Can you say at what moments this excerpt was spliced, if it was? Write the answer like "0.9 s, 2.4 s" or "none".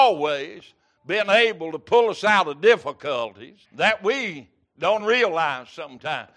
3.6 s, 5.0 s